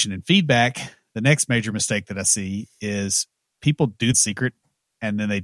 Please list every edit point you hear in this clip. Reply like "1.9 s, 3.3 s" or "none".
4.1 s